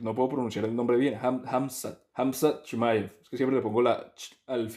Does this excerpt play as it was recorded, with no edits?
no; 1 cut; at 2.1 s

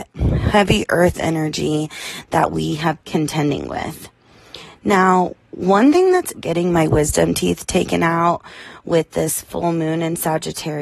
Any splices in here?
yes; 2 cuts; at 3.0 s, 6.3 s

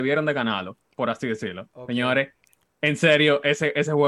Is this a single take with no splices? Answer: yes; 0 cuts

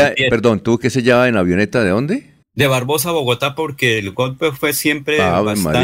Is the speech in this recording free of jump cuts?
no; 1 cut; at 2.4 s

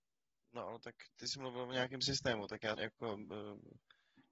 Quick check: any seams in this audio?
yes; 2 cuts; at 1.1 s, 2.7 s

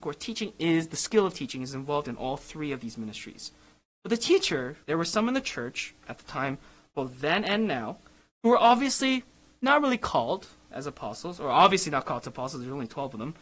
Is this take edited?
yes; 1 cut; at 4.8 s

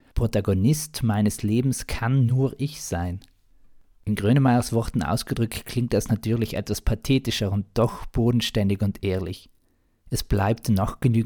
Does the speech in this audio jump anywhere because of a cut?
no; 0 cuts

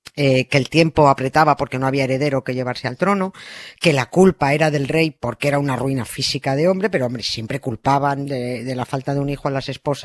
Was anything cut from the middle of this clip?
no; 0 cuts

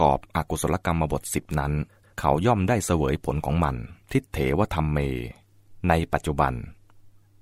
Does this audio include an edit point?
yes; 2 cuts; at 2.0 s, 4.0 s

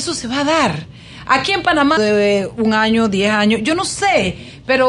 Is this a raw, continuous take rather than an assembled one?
no; 1 cut; at 2.0 s

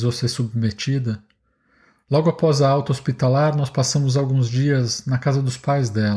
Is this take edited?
no; 0 cuts

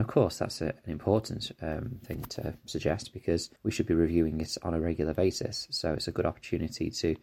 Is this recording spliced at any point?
yes; 1 cut; at 3.6 s

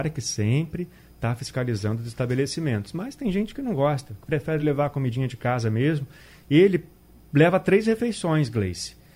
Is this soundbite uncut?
yes; 0 cuts

